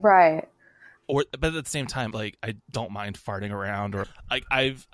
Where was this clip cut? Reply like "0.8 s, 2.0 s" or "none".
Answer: 1.0 s, 2.1 s, 2.6 s, 4.0 s

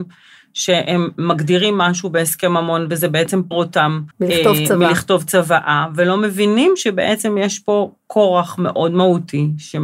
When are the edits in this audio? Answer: 3.5 s, 4.1 s

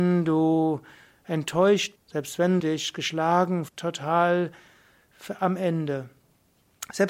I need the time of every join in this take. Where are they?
2.0 s, 2.6 s, 3.7 s

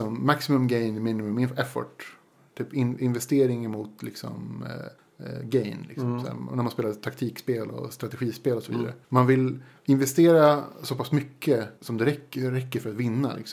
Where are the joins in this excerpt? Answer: 5.0 s, 9.0 s, 11.8 s

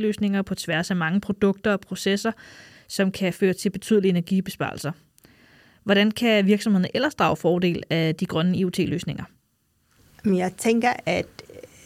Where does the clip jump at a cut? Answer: none

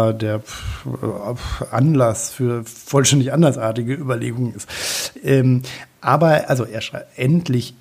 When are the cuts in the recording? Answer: none

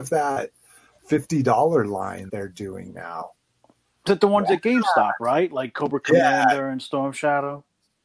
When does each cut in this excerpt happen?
2.3 s

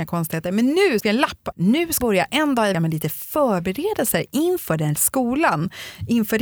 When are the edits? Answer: 1.0 s, 1.5 s, 2.0 s, 2.7 s, 5.0 s

